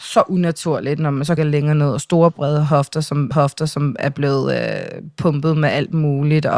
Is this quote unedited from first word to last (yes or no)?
no